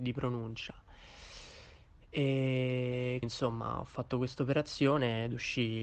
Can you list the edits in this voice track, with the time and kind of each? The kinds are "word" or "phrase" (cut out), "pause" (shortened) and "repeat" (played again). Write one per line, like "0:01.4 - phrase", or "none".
0:03.2 - word